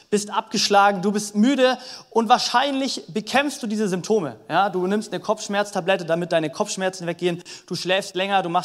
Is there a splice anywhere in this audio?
no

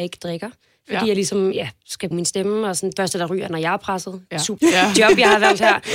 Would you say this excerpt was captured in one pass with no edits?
no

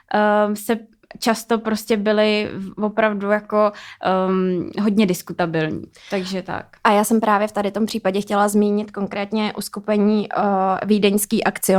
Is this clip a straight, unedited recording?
yes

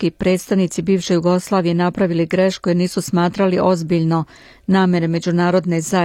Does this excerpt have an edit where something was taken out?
no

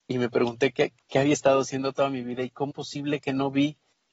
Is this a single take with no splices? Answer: no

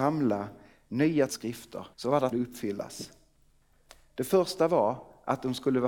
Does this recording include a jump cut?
yes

